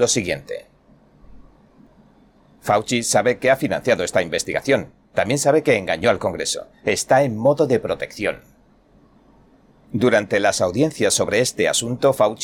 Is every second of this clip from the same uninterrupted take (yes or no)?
yes